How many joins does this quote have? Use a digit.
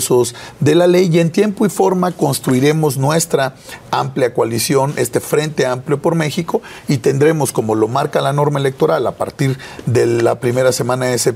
0